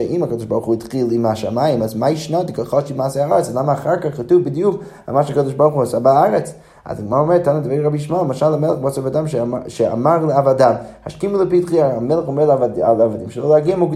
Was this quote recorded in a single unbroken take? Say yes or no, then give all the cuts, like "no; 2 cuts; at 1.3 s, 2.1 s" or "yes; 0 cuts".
yes; 0 cuts